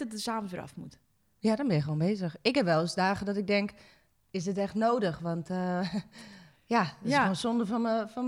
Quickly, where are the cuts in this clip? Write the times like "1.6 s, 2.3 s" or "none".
none